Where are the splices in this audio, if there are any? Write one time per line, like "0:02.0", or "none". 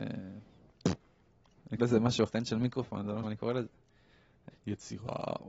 0:01.8
0:02.3
0:03.2
0:04.5